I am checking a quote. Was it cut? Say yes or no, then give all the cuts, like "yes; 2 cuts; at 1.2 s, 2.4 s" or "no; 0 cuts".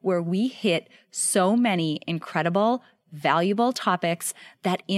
no; 0 cuts